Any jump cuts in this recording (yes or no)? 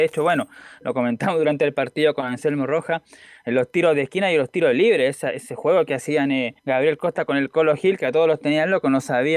yes